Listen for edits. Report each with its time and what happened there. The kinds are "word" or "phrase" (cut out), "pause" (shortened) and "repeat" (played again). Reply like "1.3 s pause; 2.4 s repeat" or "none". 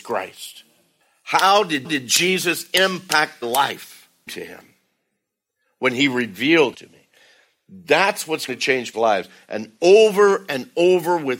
1.8 s repeat; 3.4 s word; 4.3 s phrase; 6.7 s word; 8.5 s word; 8.9 s word